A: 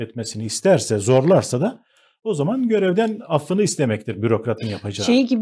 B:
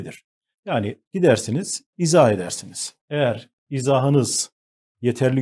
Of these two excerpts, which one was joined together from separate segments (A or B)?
B